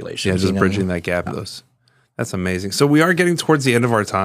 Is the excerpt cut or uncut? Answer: cut